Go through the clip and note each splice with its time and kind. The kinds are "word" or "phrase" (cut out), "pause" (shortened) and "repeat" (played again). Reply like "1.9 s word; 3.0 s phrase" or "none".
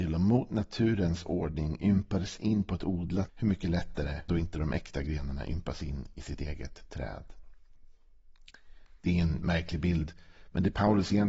3.3 s word; 4.3 s word